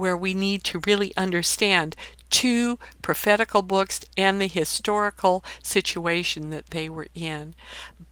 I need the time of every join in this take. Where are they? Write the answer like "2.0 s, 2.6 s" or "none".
none